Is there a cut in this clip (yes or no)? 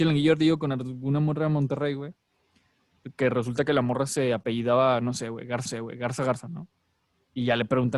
yes